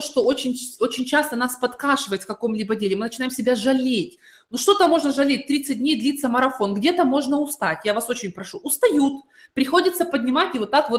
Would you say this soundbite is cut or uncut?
uncut